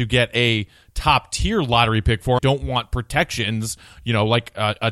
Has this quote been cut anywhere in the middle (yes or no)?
yes